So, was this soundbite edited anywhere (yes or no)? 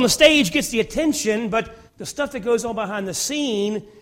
yes